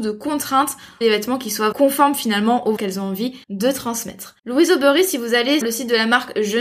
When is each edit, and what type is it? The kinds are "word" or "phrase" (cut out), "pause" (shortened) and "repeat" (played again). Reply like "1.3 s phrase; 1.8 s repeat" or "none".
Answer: 1.0 s phrase; 1.7 s word; 2.8 s word; 3.4 s pause; 4.4 s pause; 5.6 s word